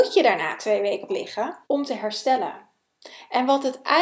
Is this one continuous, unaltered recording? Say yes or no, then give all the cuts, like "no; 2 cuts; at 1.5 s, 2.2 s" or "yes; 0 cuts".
no; 2 cuts; at 1.1 s, 1.6 s